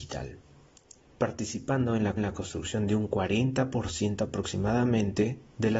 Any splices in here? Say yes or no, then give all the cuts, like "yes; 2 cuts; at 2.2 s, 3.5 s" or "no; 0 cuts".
yes; 1 cut; at 2.2 s